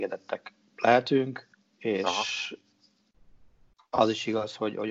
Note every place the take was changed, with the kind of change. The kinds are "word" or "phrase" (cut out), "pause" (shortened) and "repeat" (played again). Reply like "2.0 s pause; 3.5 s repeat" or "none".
1.5 s pause